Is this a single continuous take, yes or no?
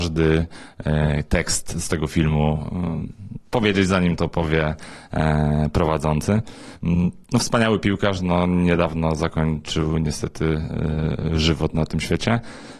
no